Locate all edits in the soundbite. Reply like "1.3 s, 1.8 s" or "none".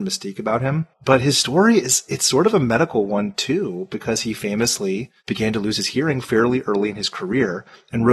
5.2 s